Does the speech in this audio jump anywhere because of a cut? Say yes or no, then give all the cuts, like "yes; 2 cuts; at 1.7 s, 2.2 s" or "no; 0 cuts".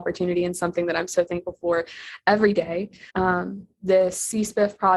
yes; 1 cut; at 3.1 s